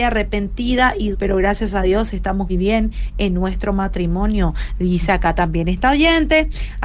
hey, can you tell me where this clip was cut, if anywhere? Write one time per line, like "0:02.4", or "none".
0:01.1
0:02.5